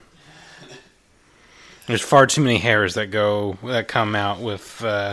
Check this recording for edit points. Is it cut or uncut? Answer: uncut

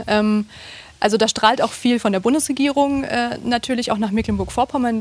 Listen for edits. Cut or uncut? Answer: uncut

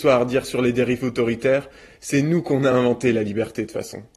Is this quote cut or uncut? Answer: uncut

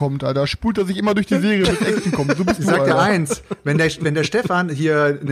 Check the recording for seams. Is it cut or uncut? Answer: uncut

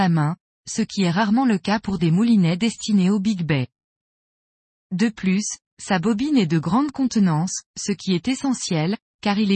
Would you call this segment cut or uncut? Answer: uncut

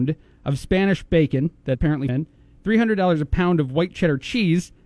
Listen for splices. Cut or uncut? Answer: cut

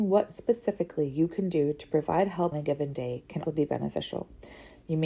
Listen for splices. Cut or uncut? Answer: cut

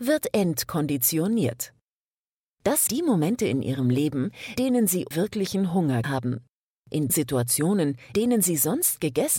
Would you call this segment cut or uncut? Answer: cut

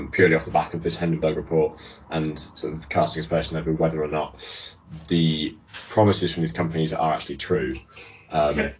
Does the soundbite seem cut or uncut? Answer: uncut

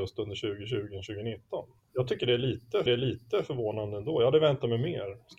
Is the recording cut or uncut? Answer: cut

